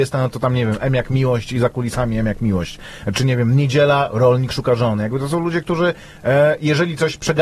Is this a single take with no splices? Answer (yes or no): yes